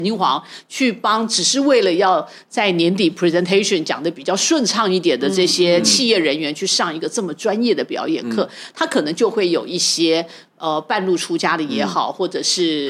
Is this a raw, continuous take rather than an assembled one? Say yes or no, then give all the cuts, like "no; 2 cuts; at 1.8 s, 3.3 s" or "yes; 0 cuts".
yes; 0 cuts